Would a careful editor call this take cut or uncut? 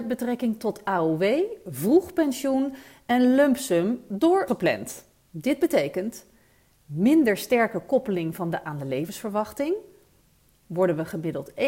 cut